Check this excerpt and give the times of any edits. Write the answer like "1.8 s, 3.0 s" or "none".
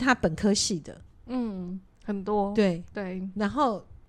none